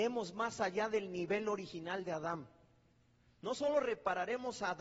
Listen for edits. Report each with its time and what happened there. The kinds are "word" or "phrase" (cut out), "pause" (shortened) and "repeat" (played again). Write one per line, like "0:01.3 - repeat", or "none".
none